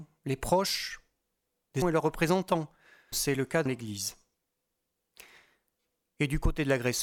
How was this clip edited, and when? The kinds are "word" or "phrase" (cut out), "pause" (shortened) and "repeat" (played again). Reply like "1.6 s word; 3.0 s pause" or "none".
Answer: 1.8 s word; 3.1 s word; 3.7 s word